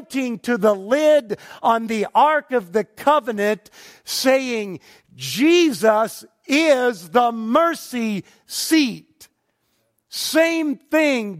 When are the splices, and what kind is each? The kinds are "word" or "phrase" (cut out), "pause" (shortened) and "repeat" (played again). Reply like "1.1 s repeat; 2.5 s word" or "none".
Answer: none